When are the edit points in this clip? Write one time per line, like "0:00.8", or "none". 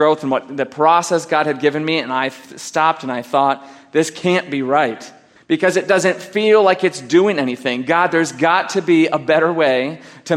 0:05.4